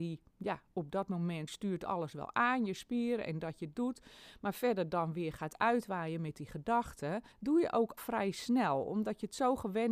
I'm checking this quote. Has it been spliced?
yes; 3 cuts; at 1.5 s, 7.3 s, 8.0 s

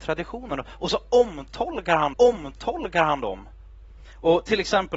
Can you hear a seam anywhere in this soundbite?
yes; 1 cut; at 2.1 s

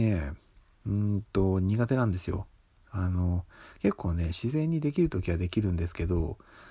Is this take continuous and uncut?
yes; 0 cuts

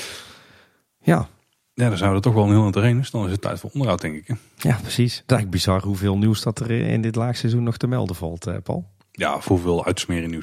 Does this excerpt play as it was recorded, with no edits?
yes; 0 cuts

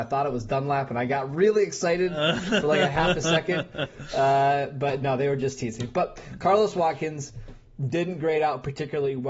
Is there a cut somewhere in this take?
no; 0 cuts

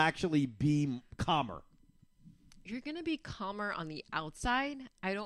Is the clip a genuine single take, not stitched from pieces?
yes; 0 cuts

